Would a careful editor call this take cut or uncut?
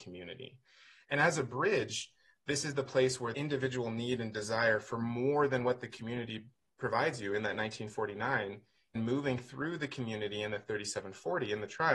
cut